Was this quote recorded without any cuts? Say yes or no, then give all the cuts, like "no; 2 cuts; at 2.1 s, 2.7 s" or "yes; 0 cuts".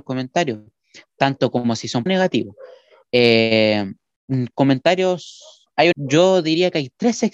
no; 2 cuts; at 2.1 s, 5.9 s